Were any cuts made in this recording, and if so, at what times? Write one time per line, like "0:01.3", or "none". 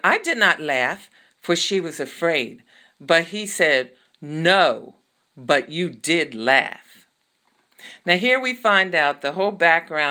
none